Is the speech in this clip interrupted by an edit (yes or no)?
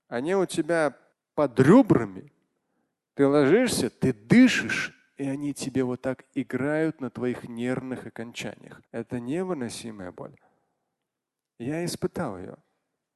yes